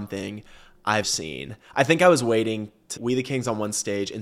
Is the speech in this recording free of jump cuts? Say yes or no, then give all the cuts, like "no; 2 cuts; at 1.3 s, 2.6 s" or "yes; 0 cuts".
no; 2 cuts; at 1.0 s, 3.0 s